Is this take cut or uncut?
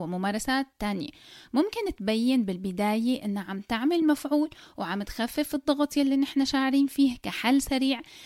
uncut